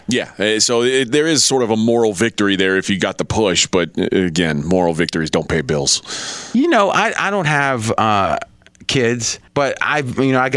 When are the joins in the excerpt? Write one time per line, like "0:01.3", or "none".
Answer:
0:09.5